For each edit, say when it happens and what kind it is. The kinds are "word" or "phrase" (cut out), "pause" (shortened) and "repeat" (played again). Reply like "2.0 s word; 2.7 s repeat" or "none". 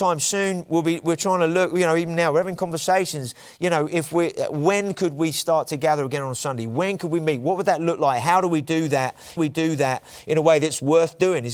9.4 s repeat

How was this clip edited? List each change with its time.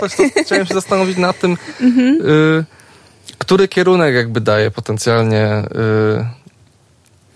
none

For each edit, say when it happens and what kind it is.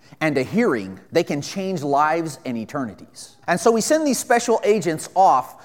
1.1 s pause; 3.4 s pause

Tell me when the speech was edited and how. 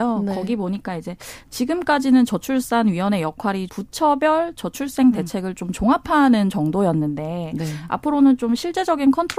3.7 s word

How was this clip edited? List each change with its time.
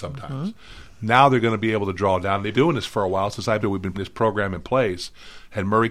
2.5 s word; 3.6 s phrase; 3.9 s word

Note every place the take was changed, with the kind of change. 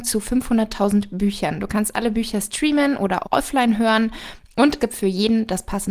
3.2 s word; 4.8 s word

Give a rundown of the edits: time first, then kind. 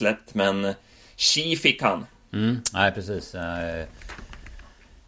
none

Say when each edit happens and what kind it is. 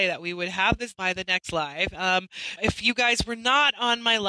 0.9 s word; 2.6 s word

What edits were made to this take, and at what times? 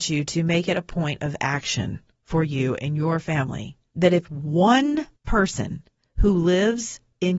3.9 s pause; 5.2 s pause

